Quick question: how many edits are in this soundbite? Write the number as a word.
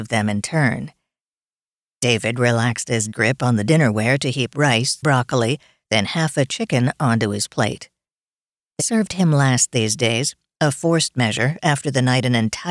three